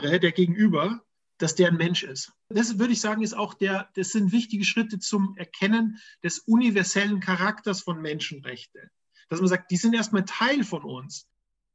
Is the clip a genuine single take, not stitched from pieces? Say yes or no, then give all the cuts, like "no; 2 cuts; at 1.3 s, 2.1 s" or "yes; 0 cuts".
yes; 0 cuts